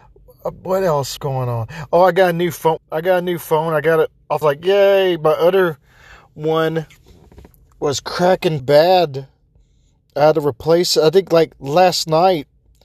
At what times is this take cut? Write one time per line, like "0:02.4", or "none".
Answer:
0:01.2
0:02.8
0:04.4
0:08.6